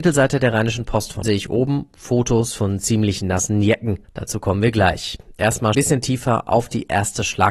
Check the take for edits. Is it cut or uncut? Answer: cut